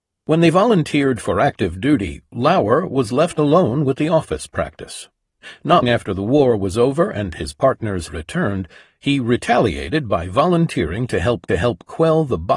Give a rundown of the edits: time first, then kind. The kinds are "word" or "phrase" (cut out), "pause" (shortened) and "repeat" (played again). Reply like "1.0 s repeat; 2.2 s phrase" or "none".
5.8 s word; 8.1 s word; 11.5 s repeat

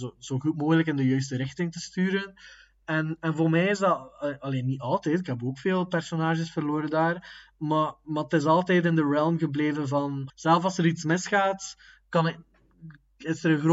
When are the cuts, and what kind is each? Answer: 10.3 s word

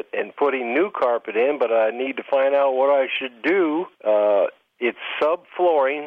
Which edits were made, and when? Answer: 3.9 s pause

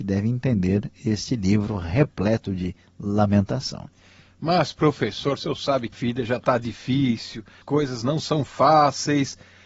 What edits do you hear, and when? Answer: 5.9 s word; 7.6 s word

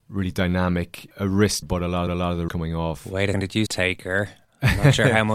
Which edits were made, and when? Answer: 1.1 s pause; 1.6 s word; 2.1 s repeat; 2.5 s word; 3.3 s word; 3.7 s phrase

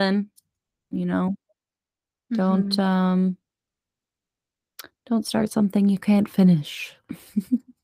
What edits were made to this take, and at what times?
none

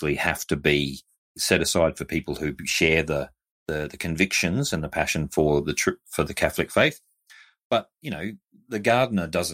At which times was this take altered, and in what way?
none

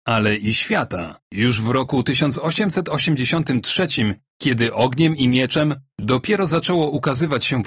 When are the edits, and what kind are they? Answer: 1.2 s pause

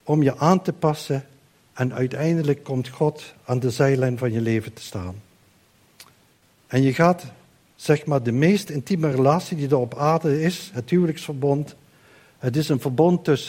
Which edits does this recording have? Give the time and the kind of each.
none

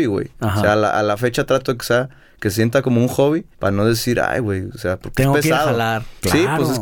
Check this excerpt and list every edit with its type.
3.5 s pause

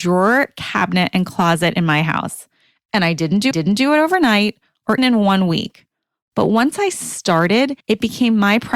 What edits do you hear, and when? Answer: 3.5 s repeat; 5.0 s word; 7.8 s pause

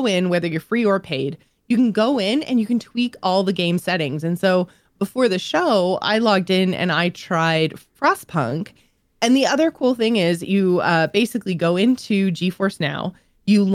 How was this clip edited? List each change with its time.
none

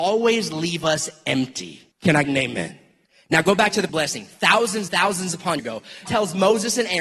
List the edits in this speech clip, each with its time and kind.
1.9 s pause; 2.2 s word; 3.0 s pause; 3.9 s word; 4.9 s word; 5.6 s word; 6.1 s word

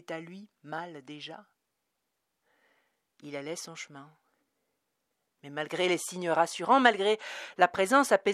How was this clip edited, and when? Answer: none

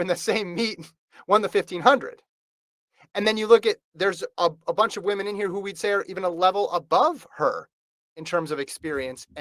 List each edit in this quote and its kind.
none

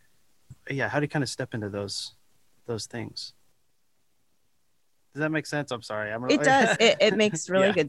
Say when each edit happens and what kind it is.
6.8 s word

